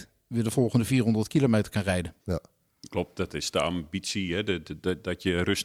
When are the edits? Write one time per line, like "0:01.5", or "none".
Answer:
0:02.2